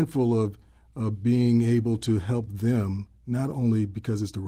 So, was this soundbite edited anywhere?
no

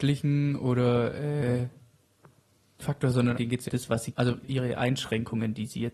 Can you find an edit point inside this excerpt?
yes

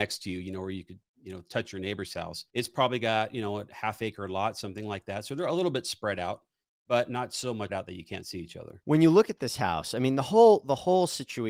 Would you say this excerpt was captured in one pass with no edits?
no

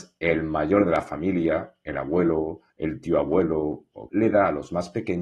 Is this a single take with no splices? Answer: no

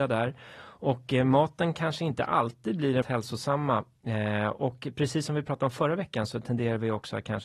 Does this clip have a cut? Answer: yes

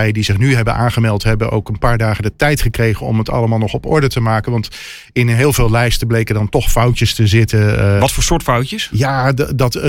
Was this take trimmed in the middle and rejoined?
no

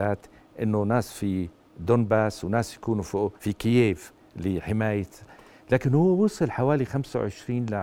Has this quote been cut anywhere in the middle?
yes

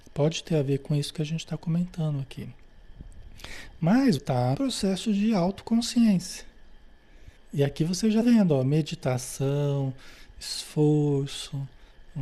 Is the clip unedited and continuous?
no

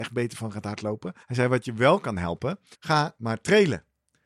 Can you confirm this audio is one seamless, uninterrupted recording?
no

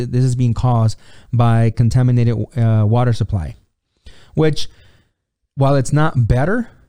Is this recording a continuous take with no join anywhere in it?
yes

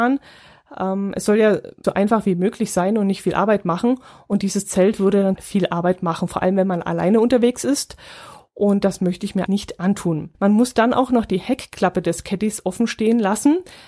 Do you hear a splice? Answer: yes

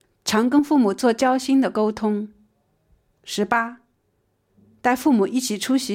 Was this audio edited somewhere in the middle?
no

